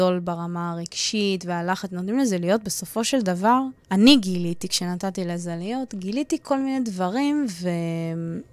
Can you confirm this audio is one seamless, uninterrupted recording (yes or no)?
no